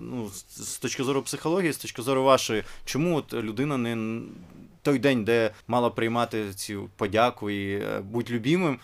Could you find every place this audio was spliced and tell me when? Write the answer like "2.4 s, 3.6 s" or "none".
5.6 s